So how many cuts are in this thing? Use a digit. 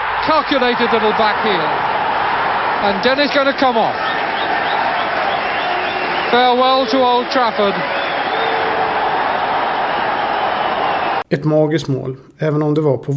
1